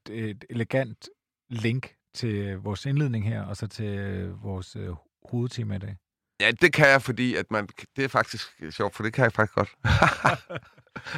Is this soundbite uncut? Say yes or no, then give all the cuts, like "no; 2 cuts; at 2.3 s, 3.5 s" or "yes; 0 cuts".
yes; 0 cuts